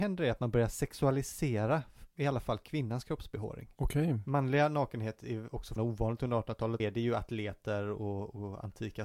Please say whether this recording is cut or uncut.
cut